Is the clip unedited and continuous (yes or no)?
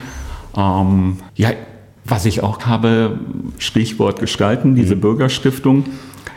no